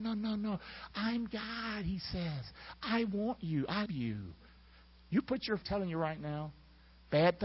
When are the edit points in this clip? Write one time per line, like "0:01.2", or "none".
0:03.9
0:05.6